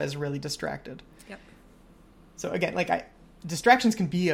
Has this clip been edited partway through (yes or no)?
no